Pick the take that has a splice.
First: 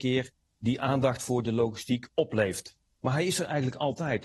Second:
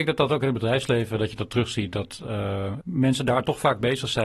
second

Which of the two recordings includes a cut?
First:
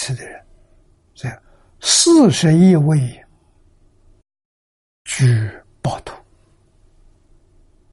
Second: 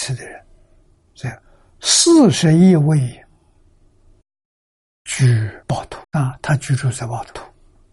second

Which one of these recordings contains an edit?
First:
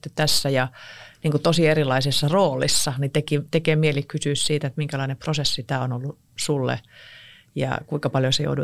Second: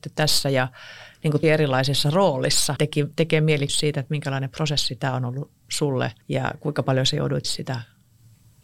second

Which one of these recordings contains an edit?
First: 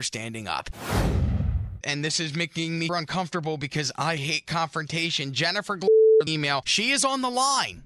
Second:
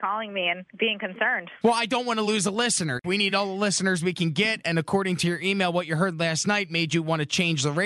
first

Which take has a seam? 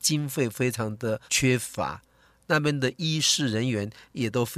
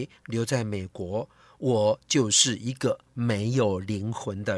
first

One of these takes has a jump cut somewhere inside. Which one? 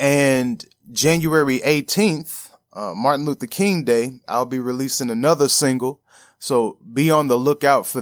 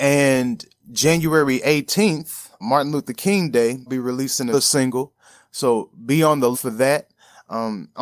second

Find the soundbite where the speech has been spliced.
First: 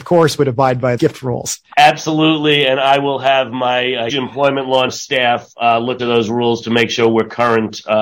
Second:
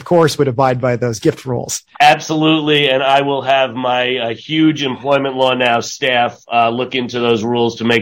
first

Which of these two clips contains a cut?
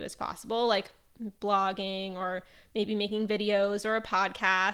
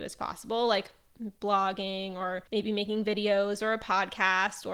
second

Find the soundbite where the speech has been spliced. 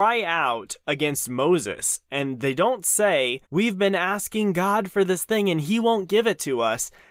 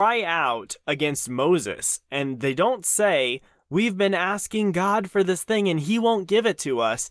first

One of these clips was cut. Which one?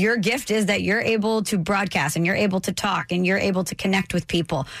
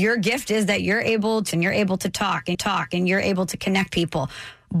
second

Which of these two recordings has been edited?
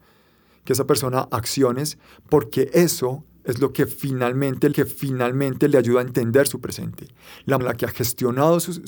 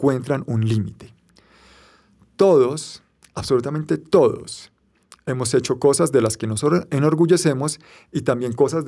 first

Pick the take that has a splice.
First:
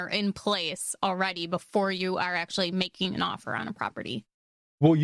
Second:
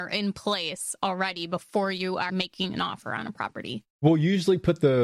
second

